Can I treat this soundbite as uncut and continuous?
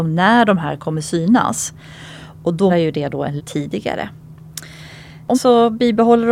no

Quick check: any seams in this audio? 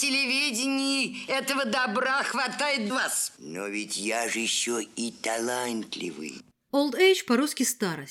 yes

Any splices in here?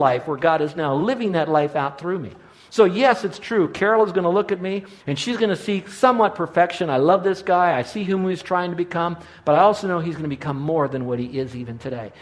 yes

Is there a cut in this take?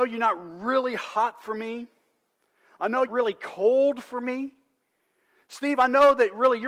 yes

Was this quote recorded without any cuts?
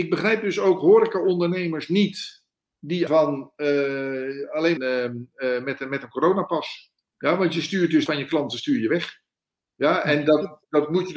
no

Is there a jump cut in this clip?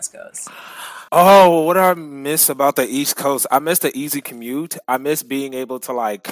yes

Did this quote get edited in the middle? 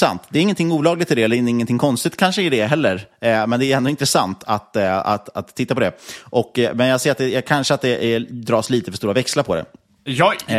no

